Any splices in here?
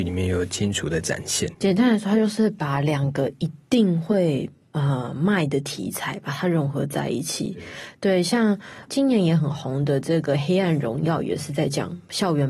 no; 0 cuts

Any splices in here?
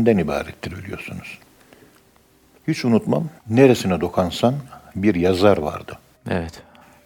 yes; 2 cuts; at 3.4 s, 4.9 s

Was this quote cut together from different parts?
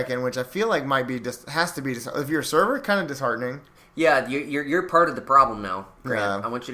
no; 0 cuts

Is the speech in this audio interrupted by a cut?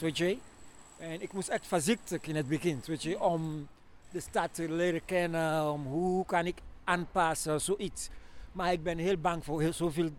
no; 0 cuts

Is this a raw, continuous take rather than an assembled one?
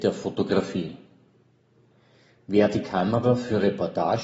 yes; 0 cuts

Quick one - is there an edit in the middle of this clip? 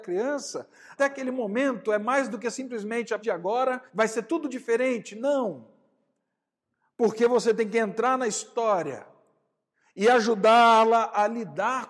yes; 3 cuts; at 1.0 s, 3.2 s, 3.9 s

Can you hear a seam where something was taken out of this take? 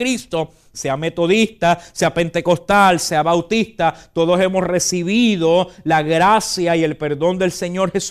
no; 0 cuts

